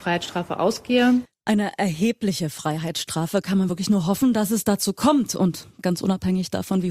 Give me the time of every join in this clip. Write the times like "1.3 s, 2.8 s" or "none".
none